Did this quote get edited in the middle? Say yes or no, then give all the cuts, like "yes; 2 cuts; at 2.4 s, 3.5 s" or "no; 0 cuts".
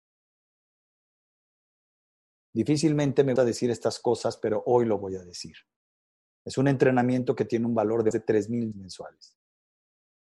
yes; 3 cuts; at 3.4 s, 8.1 s, 8.7 s